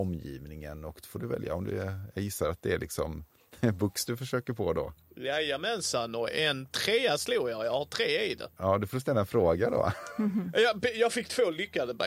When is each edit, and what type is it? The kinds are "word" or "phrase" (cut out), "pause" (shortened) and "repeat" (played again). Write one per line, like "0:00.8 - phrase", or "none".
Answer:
none

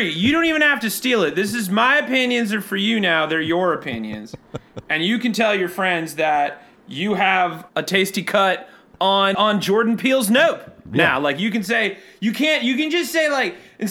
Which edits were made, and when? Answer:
0:07.7 - word
0:09.3 - word

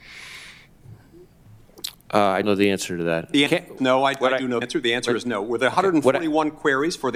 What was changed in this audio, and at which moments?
0:02.4 - word
0:03.5 - word
0:03.8 - phrase
0:04.6 - word

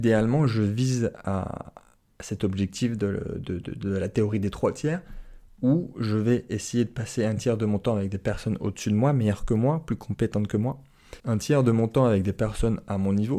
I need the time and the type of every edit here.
0:11.2 - pause

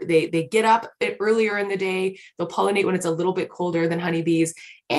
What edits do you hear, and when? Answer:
none

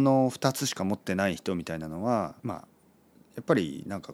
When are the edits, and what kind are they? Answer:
0:02.4 - pause

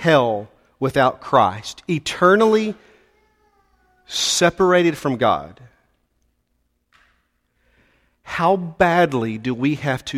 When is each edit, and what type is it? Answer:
none

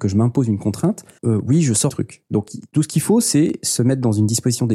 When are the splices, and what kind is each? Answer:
0:01.2 - word
0:01.9 - word

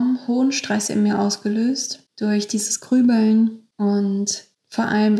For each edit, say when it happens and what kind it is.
0:02.1 - pause

